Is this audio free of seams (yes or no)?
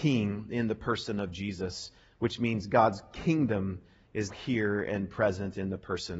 no